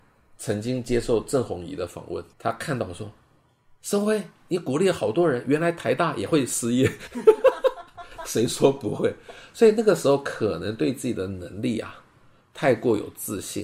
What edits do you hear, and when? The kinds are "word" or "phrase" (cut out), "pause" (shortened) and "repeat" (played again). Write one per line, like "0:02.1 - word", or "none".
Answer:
0:02.3 - word

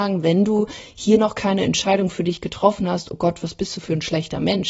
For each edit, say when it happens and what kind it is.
none

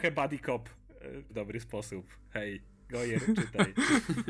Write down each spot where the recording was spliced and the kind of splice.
0:01.3 - word

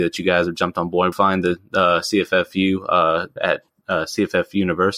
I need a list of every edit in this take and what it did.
0:01.1 - phrase
0:03.4 - word

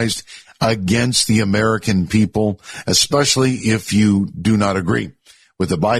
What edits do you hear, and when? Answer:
none

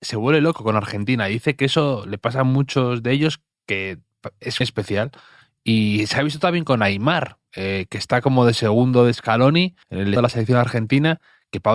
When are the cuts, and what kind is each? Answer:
0:04.6 - word
0:09.8 - pause
0:10.2 - phrase

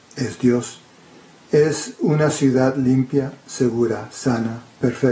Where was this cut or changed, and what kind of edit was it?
none

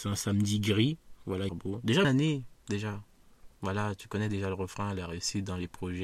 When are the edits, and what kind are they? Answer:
0:01.5 - phrase
0:02.0 - word
0:03.6 - pause

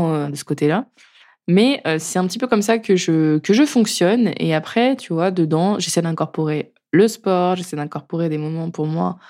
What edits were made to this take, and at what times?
none

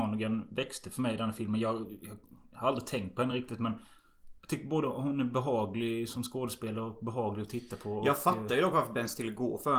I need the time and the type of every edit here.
none

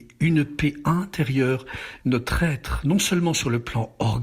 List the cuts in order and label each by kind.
0:02.0 - phrase

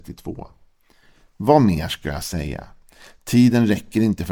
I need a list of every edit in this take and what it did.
none

